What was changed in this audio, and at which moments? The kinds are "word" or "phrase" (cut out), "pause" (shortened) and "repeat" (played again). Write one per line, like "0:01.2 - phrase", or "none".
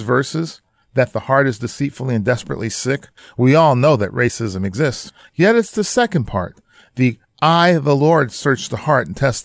none